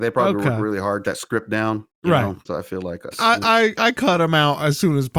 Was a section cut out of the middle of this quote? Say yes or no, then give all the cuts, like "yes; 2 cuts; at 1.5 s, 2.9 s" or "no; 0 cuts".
yes; 4 cuts; at 1.0 s, 1.9 s, 2.4 s, 3.1 s